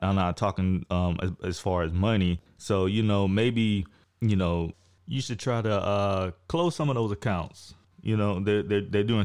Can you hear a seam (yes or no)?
no